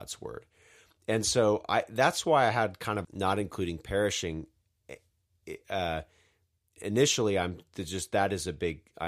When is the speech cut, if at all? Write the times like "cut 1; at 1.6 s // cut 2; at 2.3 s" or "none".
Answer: cut 1; at 3.0 s // cut 2; at 6.8 s